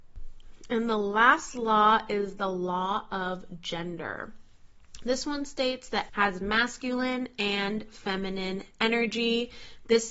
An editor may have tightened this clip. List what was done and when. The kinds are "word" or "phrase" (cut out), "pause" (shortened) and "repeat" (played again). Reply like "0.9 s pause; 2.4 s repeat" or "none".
6.1 s word